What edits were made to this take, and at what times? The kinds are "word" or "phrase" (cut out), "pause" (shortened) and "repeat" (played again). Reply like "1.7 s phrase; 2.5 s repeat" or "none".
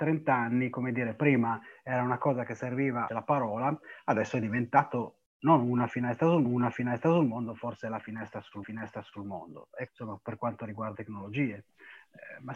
3.1 s phrase; 6.4 s repeat; 8.6 s repeat; 9.9 s word; 10.9 s word